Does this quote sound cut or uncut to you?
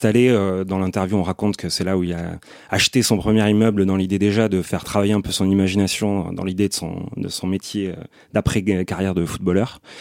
uncut